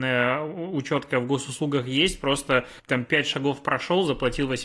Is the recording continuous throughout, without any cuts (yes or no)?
no